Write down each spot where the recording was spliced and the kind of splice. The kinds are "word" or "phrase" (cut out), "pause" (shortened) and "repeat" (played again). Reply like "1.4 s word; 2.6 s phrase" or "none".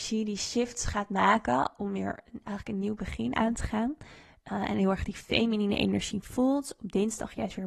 none